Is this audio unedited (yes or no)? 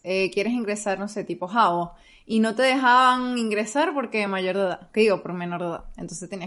yes